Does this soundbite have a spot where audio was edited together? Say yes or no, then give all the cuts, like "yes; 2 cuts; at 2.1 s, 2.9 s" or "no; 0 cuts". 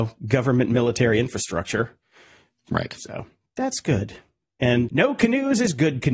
yes; 1 cut; at 4.9 s